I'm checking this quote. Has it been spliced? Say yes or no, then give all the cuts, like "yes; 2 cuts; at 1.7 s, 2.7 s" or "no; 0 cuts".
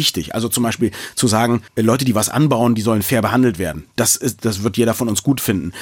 yes; 1 cut; at 1.7 s